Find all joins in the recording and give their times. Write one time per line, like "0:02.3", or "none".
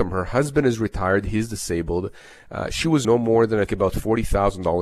0:03.0
0:03.7